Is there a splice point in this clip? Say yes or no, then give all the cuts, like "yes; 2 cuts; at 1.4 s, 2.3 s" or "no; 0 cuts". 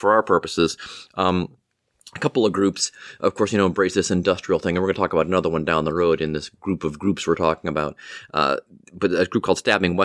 no; 0 cuts